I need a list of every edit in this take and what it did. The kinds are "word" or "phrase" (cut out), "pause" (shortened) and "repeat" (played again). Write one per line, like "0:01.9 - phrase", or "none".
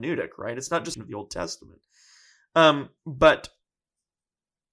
0:00.9 - phrase